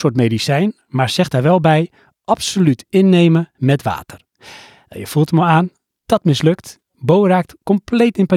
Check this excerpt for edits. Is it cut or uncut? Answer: uncut